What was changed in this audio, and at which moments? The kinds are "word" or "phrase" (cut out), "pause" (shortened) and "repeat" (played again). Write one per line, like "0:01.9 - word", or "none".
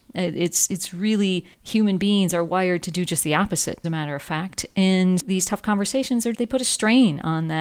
0:01.5 - pause
0:03.8 - word
0:05.2 - word
0:06.3 - word